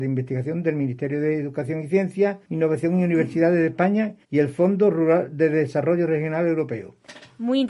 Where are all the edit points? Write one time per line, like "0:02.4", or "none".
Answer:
0:02.4
0:04.2